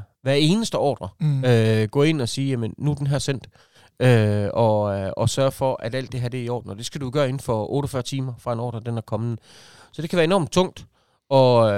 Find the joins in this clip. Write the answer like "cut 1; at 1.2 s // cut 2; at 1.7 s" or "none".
none